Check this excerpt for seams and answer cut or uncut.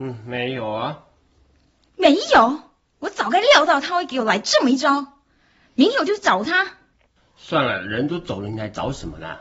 uncut